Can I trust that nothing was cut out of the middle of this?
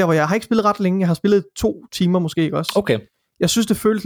yes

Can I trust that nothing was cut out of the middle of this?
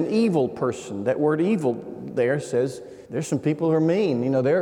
no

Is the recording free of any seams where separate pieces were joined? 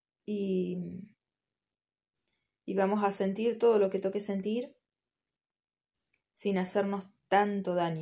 yes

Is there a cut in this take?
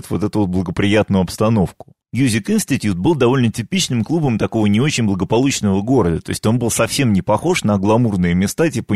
yes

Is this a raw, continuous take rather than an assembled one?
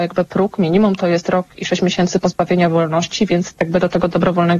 yes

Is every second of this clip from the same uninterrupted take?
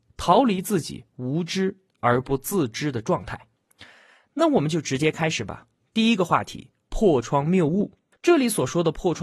no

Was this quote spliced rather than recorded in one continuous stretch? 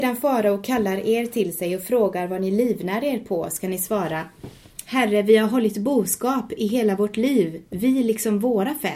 yes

